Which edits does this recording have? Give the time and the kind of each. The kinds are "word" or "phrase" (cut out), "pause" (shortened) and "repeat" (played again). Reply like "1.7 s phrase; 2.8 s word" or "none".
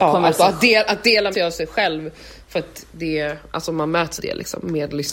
1.3 s word; 4.2 s word